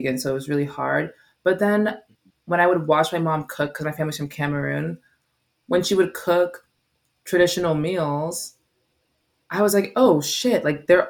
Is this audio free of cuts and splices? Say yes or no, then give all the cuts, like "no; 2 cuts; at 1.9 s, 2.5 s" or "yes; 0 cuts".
yes; 0 cuts